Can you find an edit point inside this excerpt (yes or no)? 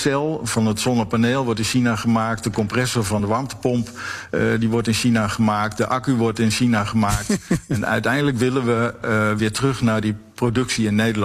no